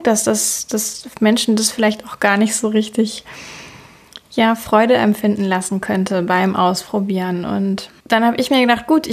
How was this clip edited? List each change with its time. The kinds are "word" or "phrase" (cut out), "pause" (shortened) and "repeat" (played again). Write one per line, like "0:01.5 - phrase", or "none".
none